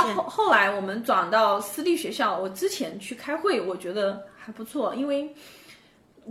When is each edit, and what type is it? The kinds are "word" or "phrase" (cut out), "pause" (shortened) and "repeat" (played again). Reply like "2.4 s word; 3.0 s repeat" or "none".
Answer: none

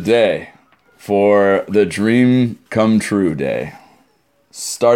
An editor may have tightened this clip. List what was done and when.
2.7 s pause

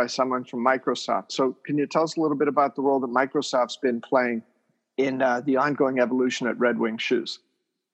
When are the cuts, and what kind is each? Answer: none

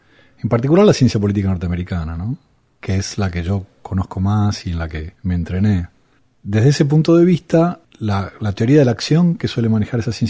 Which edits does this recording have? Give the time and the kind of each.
5.2 s pause; 6.2 s pause; 7.8 s word

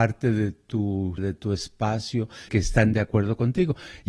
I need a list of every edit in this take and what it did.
1.2 s word; 2.5 s word

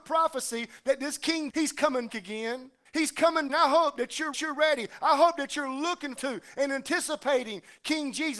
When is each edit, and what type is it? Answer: 1.5 s word; 2.1 s word; 2.9 s pause; 3.5 s phrase; 4.3 s repeat; 6.2 s word

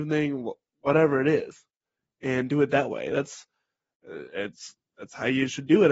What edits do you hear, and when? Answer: none

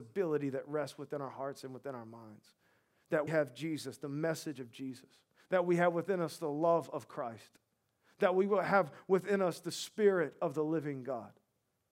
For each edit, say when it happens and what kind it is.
3.3 s word; 5.3 s pause

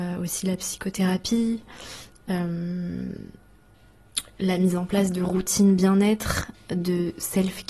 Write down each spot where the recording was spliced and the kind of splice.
none

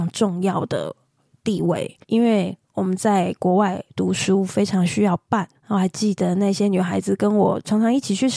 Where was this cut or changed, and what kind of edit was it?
2.0 s pause; 5.5 s pause

